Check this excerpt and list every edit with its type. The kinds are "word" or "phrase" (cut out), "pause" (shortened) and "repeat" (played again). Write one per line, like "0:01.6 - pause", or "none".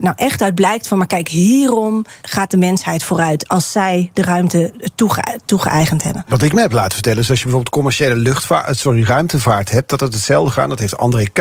0:02.2 - pause

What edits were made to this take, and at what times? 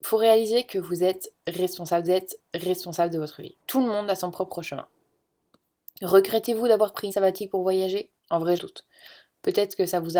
0:02.1 - repeat
0:03.6 - pause
0:07.1 - word
0:08.2 - pause
0:08.6 - word

